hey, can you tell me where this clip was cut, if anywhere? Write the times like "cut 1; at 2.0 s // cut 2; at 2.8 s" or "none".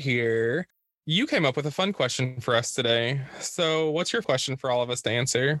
cut 1; at 4.2 s

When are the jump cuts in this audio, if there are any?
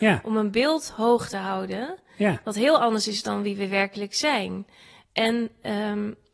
none

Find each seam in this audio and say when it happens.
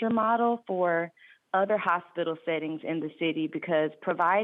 none

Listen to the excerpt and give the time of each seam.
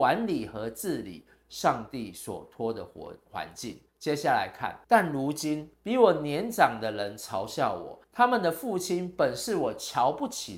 cut 1; at 3.9 s // cut 2; at 4.8 s // cut 3; at 5.7 s // cut 4; at 8.0 s

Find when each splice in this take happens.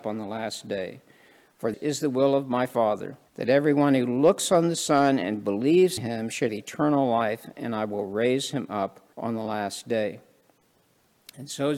cut 1; at 1.7 s // cut 2; at 3.3 s // cut 3; at 6.0 s // cut 4; at 6.5 s // cut 5; at 9.1 s

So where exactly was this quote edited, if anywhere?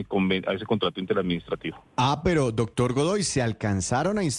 cut 1; at 1.8 s

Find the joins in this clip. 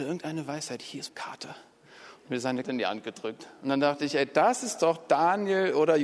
cut 1; at 1.1 s // cut 2; at 2.6 s

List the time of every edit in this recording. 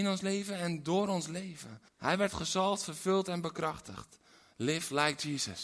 cut 1; at 1.9 s

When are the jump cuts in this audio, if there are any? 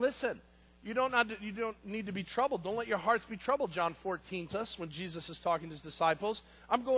cut 1; at 4.5 s

